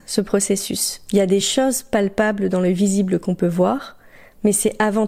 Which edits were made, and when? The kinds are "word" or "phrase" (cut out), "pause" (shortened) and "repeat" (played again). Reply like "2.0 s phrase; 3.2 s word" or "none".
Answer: none